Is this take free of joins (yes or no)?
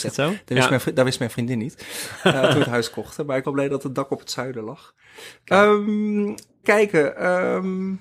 no